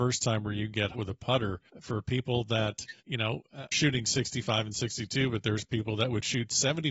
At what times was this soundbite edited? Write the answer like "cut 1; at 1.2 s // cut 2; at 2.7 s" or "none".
cut 1; at 0.9 s // cut 2; at 1.7 s // cut 3; at 3.0 s // cut 4; at 3.7 s